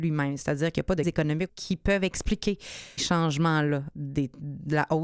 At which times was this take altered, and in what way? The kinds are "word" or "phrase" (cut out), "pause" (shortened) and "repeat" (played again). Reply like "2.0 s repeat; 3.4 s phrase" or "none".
1.0 s word; 1.5 s phrase; 3.0 s word